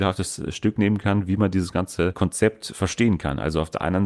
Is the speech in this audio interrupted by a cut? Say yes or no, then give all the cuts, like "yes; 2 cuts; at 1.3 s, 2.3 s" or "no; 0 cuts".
no; 0 cuts